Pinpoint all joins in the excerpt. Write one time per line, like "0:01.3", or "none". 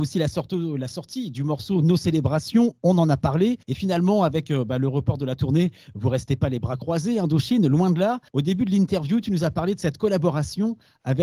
0:03.6
0:08.3